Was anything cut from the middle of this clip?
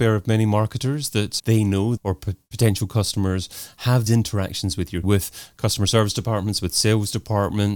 yes; 4 cuts; at 1.4 s, 2.0 s, 4.1 s, 5.0 s

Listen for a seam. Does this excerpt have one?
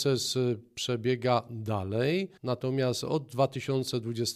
yes; 1 cut; at 2.4 s

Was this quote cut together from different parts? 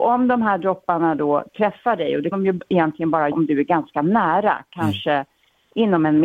yes; 2 cuts; at 2.3 s, 3.3 s

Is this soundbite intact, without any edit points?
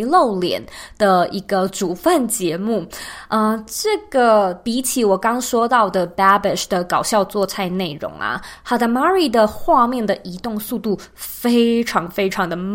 yes; 0 cuts

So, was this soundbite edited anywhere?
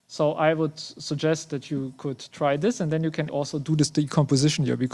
yes; 1 cut; at 3.3 s

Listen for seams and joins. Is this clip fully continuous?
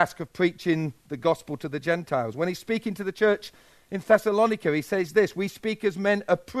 yes; 0 cuts

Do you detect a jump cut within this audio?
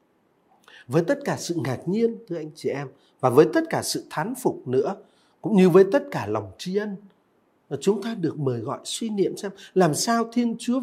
no; 0 cuts

